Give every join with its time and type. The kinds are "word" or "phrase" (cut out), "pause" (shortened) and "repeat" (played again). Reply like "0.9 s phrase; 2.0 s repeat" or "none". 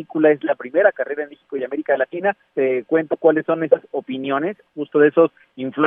none